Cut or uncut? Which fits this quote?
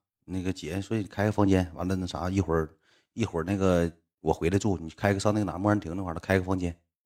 uncut